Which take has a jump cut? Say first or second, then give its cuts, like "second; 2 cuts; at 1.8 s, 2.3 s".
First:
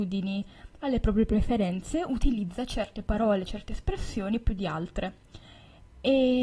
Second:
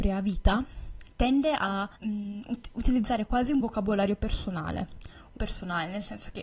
second; 3 cuts; at 2.0 s, 3.6 s, 5.4 s